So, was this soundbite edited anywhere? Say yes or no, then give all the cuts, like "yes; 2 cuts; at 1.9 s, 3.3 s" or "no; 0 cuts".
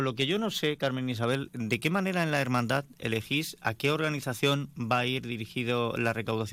yes; 1 cut; at 1.5 s